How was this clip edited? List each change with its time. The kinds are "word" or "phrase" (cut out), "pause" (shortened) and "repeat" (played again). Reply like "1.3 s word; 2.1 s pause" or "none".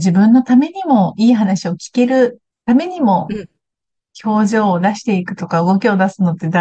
2.5 s pause